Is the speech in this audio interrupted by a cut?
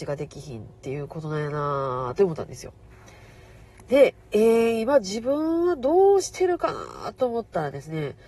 no; 0 cuts

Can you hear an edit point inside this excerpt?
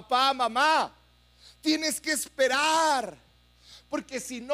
no; 0 cuts

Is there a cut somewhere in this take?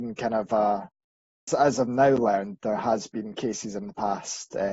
yes; 1 cut; at 1.5 s

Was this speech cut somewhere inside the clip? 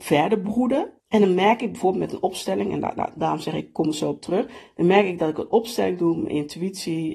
yes; 2 cuts; at 1.0 s, 3.0 s

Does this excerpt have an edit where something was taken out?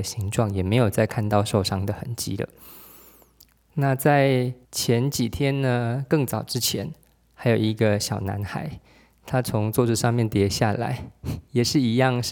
yes; 1 cut; at 4.6 s

